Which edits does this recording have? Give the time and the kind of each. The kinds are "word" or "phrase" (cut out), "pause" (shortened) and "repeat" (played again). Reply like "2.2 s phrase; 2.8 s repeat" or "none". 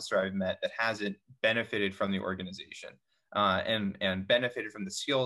none